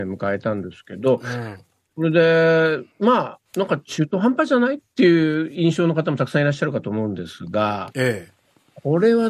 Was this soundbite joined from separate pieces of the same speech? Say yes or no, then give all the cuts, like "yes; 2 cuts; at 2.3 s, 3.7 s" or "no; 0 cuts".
yes; 2 cuts; at 2.9 s, 3.5 s